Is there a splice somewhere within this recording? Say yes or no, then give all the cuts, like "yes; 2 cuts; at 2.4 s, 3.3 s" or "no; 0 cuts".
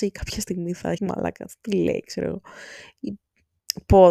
yes; 1 cut; at 1.0 s